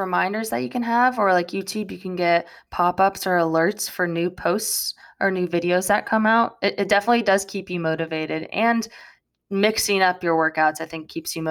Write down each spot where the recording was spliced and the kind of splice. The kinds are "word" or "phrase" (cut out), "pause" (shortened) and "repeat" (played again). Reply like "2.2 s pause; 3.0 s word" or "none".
none